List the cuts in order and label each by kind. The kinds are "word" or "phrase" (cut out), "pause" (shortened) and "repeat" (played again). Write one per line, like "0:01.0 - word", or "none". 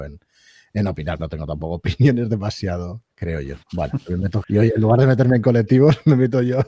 0:01.2 - word
0:03.1 - pause
0:03.6 - pause
0:04.4 - word